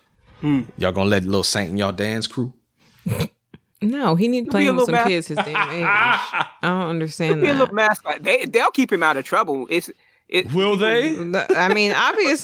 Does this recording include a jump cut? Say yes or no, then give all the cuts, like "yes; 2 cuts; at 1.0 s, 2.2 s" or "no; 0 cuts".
yes; 1 cut; at 4.5 s